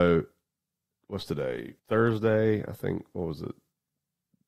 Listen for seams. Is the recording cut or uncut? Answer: cut